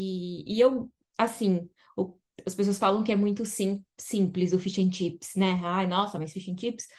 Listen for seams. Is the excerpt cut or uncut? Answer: uncut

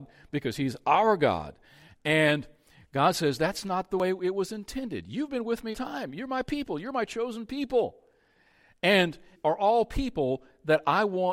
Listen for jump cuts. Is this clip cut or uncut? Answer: cut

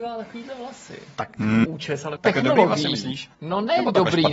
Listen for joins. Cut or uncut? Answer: cut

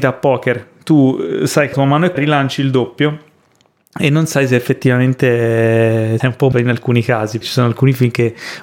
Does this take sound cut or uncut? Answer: cut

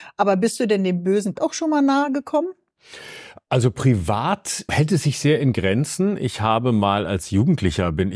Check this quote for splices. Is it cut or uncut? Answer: cut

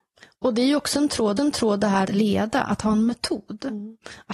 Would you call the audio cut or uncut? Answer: cut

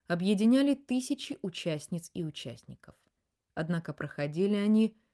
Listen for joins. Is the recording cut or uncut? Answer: uncut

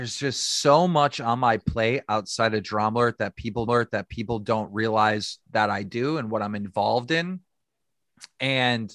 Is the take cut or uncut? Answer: cut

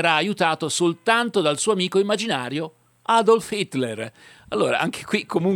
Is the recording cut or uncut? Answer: uncut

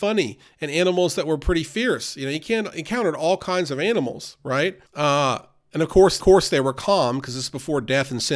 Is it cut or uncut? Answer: cut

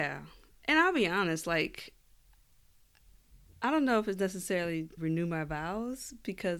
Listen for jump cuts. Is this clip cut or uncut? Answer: cut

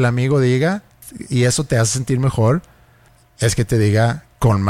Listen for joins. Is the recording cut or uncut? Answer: uncut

